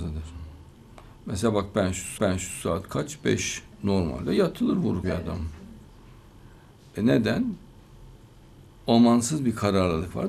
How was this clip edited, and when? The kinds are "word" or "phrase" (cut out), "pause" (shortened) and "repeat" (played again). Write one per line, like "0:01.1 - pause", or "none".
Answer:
0:02.2 - repeat
0:03.7 - pause
0:05.0 - phrase